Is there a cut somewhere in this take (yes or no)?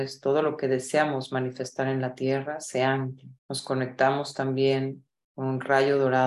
yes